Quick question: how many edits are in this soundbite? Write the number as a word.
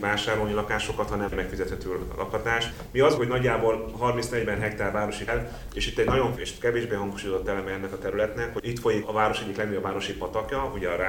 five